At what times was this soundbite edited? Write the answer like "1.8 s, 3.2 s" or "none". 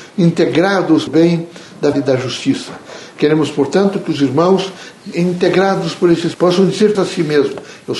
1.1 s, 1.9 s, 5.1 s, 6.3 s, 6.9 s